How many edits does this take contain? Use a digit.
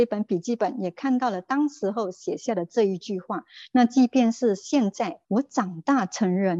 1